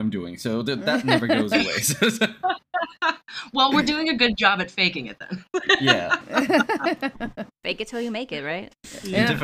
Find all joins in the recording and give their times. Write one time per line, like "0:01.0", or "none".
none

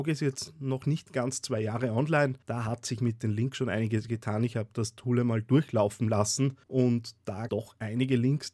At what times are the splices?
0:02.4
0:06.6
0:07.5

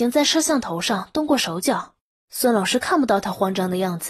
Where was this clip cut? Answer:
none

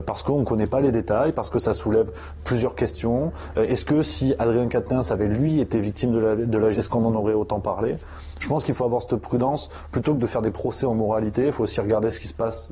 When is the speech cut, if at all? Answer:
0:06.7

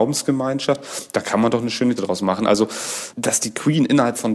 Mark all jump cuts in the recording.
0:02.0

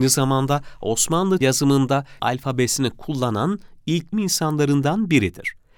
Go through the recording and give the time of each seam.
0:01.4
0:02.2
0:04.1

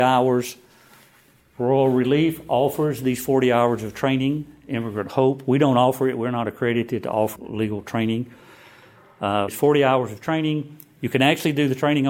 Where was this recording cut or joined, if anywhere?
0:07.4
0:09.5

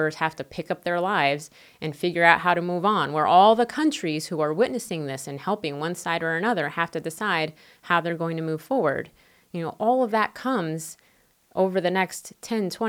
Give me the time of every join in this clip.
none

